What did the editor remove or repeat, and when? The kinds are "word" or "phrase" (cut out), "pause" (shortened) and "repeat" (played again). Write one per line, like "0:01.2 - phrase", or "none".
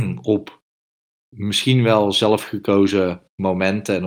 none